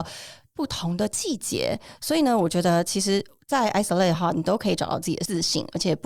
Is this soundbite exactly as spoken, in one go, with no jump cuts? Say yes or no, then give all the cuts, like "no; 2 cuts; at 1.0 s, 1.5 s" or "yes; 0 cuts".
yes; 0 cuts